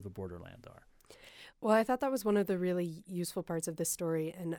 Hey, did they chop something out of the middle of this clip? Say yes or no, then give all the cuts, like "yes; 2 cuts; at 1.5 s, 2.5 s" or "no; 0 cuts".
yes; 1 cut; at 1.5 s